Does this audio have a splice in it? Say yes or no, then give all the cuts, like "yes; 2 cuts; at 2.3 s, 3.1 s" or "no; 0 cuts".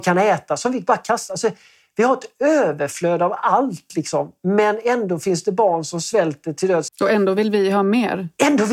no; 0 cuts